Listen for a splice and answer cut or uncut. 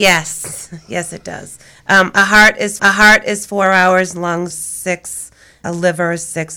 cut